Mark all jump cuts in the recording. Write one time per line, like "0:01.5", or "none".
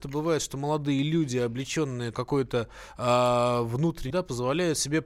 0:02.1
0:04.1